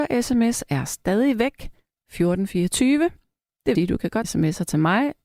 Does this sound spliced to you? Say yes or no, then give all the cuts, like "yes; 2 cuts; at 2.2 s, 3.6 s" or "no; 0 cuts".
yes; 2 cuts; at 3.8 s, 4.2 s